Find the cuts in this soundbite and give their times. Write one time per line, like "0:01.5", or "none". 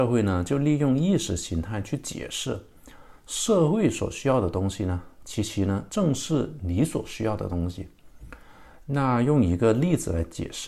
0:05.9